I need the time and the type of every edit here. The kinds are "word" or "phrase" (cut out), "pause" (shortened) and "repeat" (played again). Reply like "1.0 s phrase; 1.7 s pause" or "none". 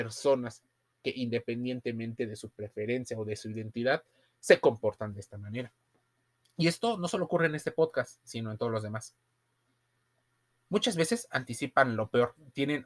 none